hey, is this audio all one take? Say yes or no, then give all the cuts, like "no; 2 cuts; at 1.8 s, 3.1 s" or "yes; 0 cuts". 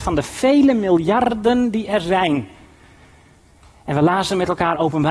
yes; 0 cuts